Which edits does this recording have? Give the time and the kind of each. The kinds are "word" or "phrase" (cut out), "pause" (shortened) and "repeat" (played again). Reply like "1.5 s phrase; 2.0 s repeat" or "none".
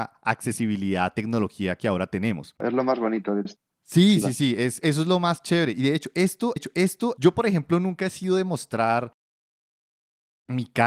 3.5 s word; 4.2 s word; 6.6 s repeat